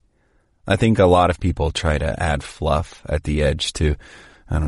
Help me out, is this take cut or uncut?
uncut